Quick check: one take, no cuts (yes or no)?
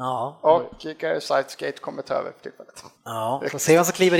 no